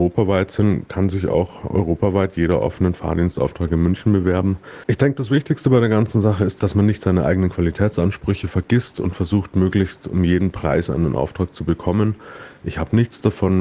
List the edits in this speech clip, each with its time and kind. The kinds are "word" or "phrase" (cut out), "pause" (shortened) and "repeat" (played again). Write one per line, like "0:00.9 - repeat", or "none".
none